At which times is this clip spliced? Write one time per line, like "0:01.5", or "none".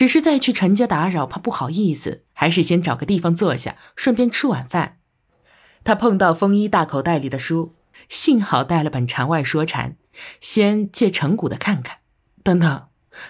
0:02.3

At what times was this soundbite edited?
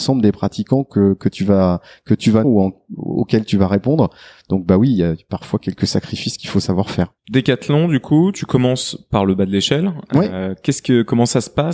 0:02.4
0:07.2

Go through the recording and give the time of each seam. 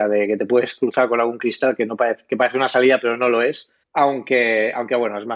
0:03.8

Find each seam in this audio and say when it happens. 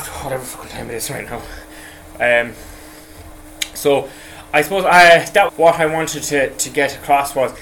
0:05.5

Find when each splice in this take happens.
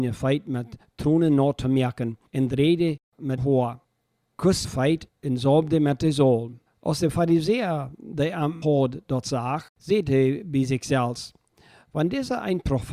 0:02.3
0:03.4
0:04.6
0:06.7
0:08.6
0:09.7

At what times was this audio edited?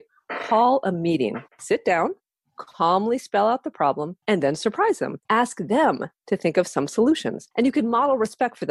0:01.5
0:04.2
0:05.2
0:07.5

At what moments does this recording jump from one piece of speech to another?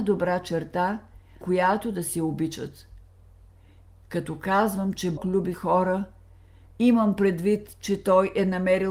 0:01.4
0:05.2
0:05.5

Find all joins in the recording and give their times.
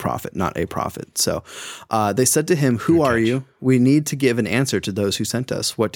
none

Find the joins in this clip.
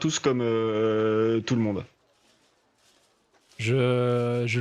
none

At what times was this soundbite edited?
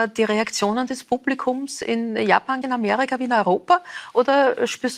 0:02.6

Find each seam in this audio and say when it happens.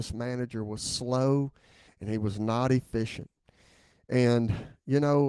none

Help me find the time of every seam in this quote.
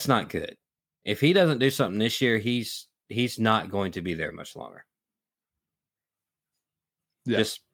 0:04.3

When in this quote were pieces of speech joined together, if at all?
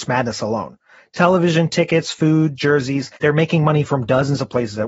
0:02.6
0:03.2

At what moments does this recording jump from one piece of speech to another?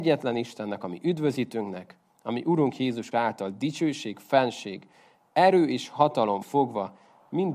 0:03.1
0:06.4

